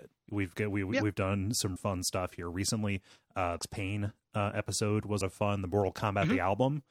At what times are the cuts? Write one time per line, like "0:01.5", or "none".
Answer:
0:01.8
0:03.6
0:05.2